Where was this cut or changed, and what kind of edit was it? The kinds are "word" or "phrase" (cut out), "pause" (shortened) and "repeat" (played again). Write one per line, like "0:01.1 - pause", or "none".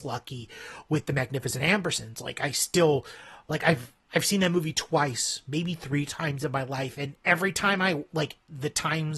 0:04.0 - pause